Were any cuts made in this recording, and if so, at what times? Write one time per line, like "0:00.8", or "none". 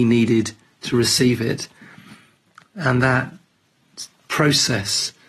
none